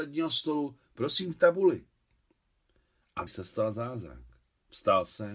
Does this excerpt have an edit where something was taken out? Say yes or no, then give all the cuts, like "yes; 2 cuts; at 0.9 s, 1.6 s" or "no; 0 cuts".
yes; 1 cut; at 3.3 s